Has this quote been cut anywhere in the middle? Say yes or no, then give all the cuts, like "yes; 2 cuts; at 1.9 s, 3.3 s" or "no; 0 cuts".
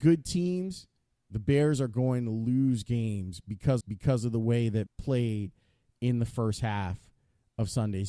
yes; 2 cuts; at 3.8 s, 4.9 s